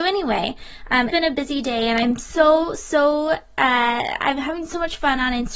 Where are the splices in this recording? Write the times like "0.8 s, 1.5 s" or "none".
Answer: 1.1 s